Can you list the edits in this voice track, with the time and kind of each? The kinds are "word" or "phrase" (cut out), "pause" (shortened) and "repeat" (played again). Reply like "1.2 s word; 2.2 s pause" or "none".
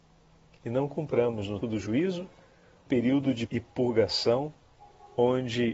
1.6 s word; 2.9 s word; 3.5 s word